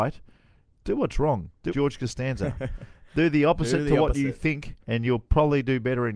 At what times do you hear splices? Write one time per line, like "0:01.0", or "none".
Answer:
0:01.7
0:04.8